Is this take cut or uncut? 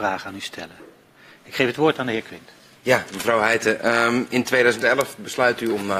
uncut